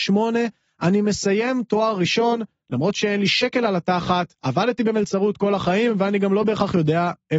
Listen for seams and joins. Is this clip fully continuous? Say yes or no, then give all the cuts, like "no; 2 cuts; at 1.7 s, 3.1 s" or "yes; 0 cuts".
yes; 0 cuts